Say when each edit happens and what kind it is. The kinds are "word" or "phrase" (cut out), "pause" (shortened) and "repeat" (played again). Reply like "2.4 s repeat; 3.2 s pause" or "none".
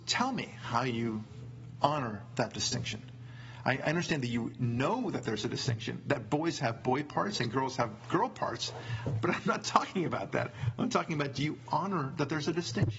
none